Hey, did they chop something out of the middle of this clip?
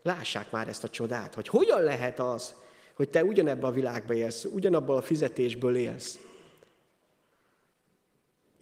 no; 0 cuts

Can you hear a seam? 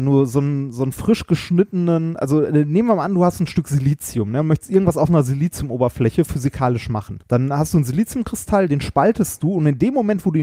yes; 1 cut; at 7.2 s

